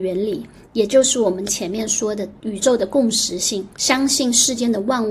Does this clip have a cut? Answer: yes; 2 cuts; at 2.4 s, 3.7 s

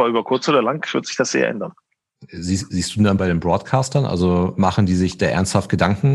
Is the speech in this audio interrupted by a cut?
yes; 1 cut; at 3.2 s

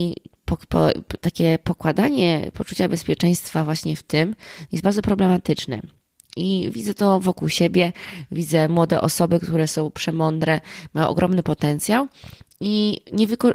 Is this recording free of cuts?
yes; 0 cuts

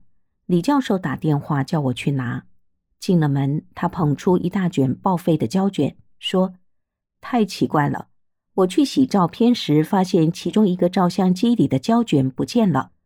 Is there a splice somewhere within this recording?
no; 0 cuts

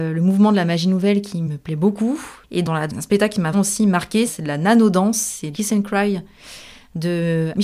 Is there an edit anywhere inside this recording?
yes; 3 cuts; at 2.9 s, 3.5 s, 5.5 s

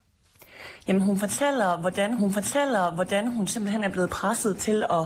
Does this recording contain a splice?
yes; 1 cut; at 2.2 s

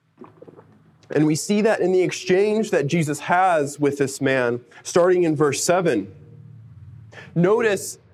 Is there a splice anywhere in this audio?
no; 0 cuts

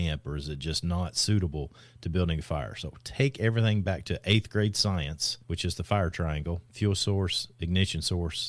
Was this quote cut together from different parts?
no; 0 cuts

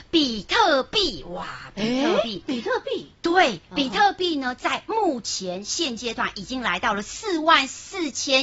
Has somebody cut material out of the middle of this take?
no; 0 cuts

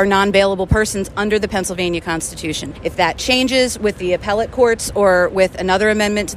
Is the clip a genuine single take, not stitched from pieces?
yes; 0 cuts

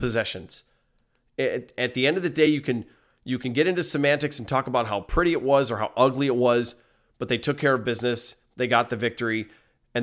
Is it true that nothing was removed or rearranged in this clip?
yes; 0 cuts

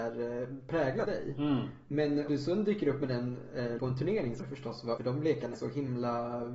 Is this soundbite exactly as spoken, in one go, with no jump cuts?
no; 6 cuts; at 1.0 s, 2.3 s, 3.8 s, 4.4 s, 5.0 s, 5.5 s

